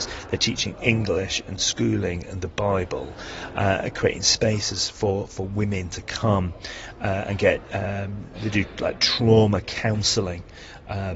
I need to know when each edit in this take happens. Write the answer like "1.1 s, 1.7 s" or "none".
none